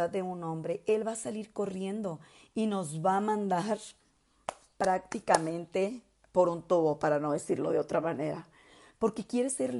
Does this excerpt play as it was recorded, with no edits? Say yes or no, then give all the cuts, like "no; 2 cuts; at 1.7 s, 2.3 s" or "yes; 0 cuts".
yes; 0 cuts